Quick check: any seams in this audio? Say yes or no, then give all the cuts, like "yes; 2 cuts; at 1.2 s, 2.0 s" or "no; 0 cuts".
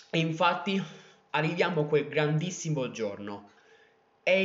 no; 0 cuts